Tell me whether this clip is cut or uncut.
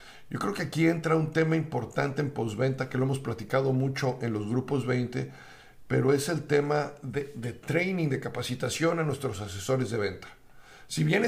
uncut